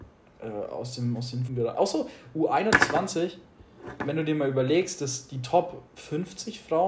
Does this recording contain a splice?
yes; 3 cuts; at 1.5 s, 4.0 s, 5.9 s

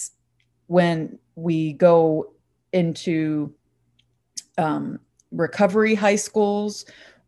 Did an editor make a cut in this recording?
no; 0 cuts

